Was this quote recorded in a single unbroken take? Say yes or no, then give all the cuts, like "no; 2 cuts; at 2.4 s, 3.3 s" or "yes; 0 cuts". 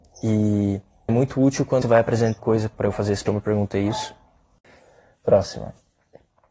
no; 5 cuts; at 1.1 s, 1.8 s, 2.4 s, 2.7 s, 3.3 s